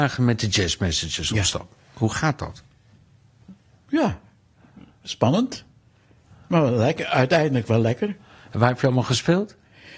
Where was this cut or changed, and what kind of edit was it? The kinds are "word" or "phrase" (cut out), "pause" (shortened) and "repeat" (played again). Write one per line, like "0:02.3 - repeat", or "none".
none